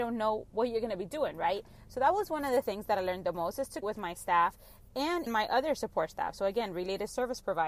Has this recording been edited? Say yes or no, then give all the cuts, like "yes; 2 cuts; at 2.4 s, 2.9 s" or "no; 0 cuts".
yes; 2 cuts; at 3.8 s, 5.3 s